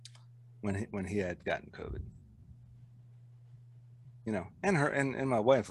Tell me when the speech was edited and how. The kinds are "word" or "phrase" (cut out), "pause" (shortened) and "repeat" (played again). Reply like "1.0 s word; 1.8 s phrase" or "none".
4.1 s pause